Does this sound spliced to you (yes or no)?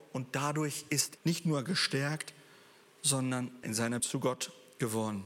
yes